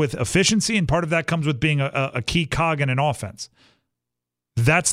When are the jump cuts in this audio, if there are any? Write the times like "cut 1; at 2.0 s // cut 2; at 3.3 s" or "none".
none